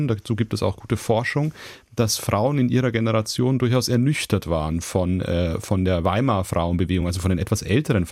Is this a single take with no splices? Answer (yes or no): yes